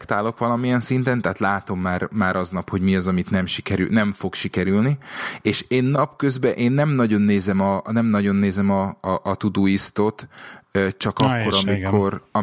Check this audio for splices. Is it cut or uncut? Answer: uncut